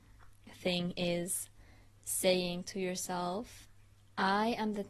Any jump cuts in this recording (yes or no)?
no